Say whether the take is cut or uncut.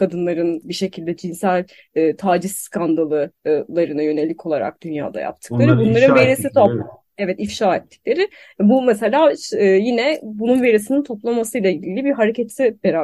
uncut